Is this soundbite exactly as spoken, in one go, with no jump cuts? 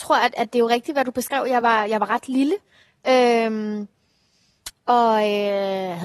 yes; 0 cuts

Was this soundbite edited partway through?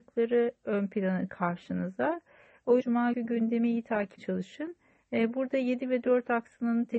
yes; 4 cuts; at 1.3 s, 2.8 s, 3.1 s, 4.2 s

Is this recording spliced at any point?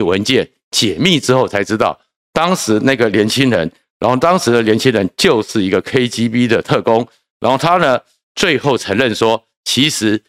no; 0 cuts

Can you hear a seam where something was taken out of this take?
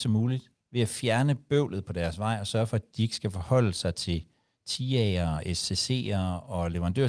no; 0 cuts

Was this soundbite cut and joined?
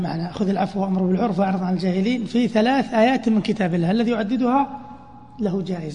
no; 0 cuts

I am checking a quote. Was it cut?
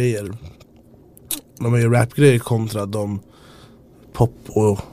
no; 0 cuts

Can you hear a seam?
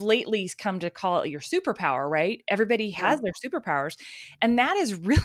no; 0 cuts

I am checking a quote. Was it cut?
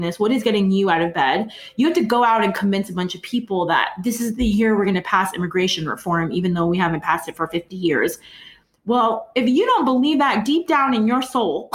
no; 0 cuts

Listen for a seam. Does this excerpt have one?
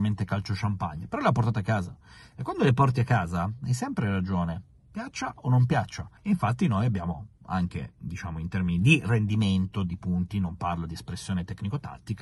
yes; 1 cut; at 6.2 s

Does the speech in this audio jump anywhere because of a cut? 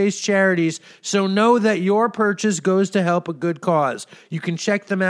no; 0 cuts

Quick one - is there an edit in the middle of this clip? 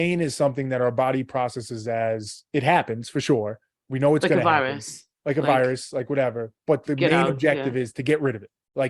no; 0 cuts

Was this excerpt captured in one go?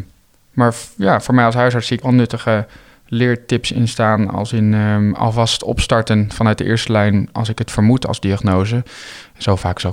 no; 1 cut; at 2.0 s

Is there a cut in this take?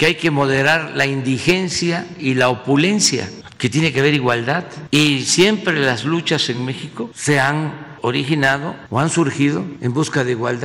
no; 0 cuts

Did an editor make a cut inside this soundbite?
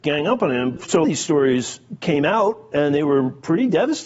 yes; 1 cut; at 1.0 s

